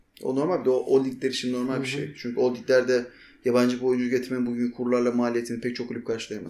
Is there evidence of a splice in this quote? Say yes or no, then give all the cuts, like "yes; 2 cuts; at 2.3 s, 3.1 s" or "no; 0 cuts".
no; 0 cuts